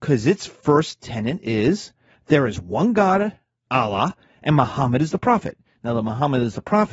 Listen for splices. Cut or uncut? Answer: uncut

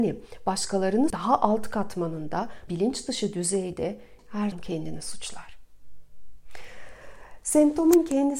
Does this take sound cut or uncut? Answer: cut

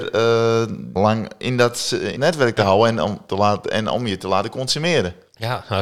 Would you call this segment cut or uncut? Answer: cut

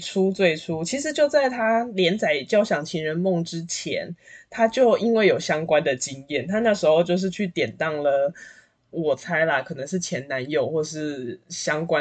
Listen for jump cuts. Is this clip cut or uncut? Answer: cut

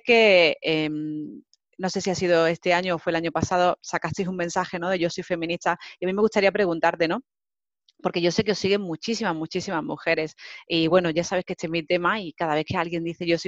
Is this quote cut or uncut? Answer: uncut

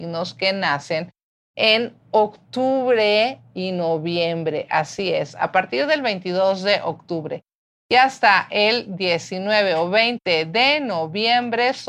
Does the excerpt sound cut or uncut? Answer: uncut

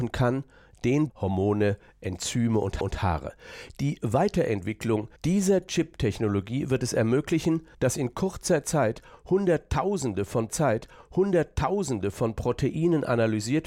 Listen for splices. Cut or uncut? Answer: cut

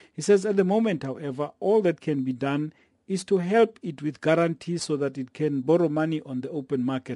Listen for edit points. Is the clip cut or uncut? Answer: uncut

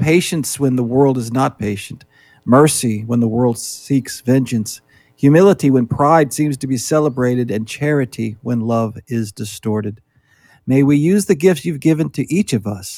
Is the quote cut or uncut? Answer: uncut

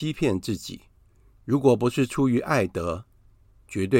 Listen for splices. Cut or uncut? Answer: uncut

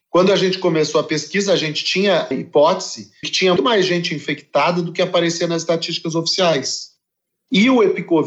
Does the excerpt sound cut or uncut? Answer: cut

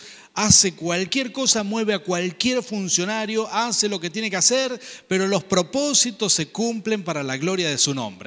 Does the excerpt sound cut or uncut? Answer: uncut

